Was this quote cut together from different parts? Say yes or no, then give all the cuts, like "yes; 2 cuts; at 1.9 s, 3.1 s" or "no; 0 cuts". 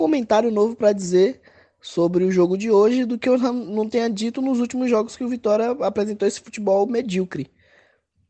no; 0 cuts